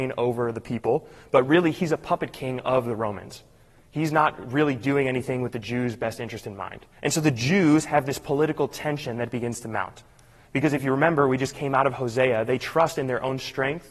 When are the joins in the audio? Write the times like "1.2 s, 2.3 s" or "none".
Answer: 6.9 s